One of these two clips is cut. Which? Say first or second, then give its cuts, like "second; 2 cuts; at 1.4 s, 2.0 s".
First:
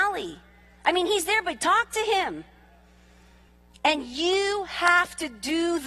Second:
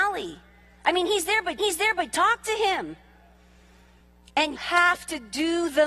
second; 2 cuts; at 1.6 s, 4.6 s